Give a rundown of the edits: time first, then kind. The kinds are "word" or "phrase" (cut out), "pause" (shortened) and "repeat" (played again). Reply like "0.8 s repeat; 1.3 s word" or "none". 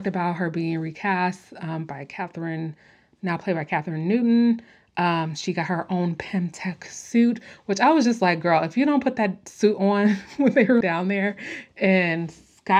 10.8 s word